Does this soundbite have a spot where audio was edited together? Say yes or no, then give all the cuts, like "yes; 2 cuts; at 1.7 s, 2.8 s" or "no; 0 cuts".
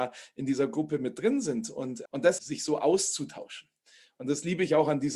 yes; 2 cuts; at 2.1 s, 2.4 s